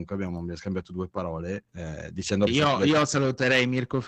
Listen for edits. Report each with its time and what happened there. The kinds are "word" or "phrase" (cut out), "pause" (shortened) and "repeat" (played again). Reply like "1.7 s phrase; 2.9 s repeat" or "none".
1.7 s pause; 2.5 s phrase